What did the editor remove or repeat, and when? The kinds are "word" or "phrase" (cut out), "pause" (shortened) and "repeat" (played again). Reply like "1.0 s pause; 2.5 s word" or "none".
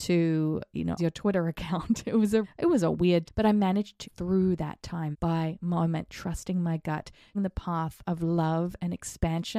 1.0 s word; 2.4 s word; 3.3 s word; 4.0 s word; 5.1 s word; 7.3 s word